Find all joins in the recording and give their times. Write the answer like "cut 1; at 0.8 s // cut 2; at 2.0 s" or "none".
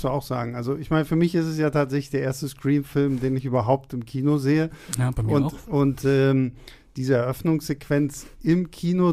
none